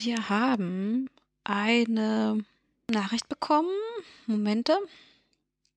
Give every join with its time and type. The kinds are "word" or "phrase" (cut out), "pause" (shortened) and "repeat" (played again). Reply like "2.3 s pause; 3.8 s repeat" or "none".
none